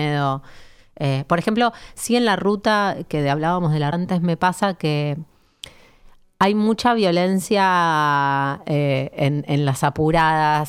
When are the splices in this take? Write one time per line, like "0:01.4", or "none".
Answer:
0:03.9